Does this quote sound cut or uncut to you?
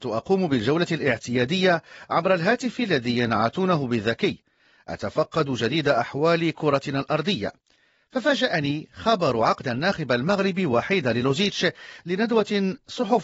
uncut